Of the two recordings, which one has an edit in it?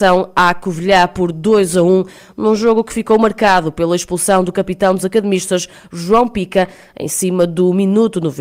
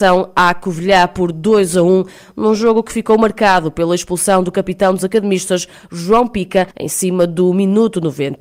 second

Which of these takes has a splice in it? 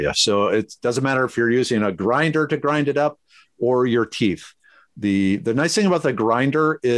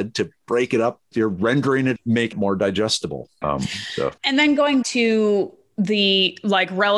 second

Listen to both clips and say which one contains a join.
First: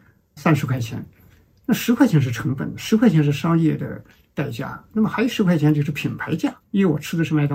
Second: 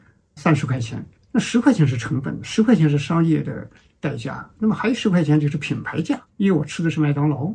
second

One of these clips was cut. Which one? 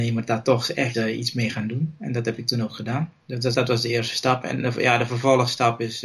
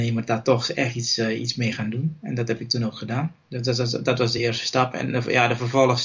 first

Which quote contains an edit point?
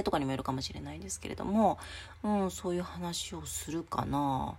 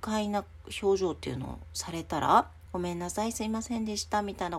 second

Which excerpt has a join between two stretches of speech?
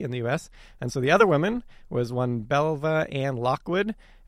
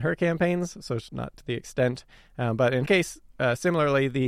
second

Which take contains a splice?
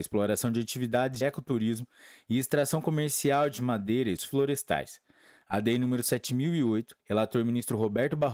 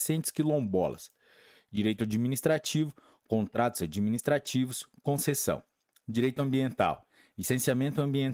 first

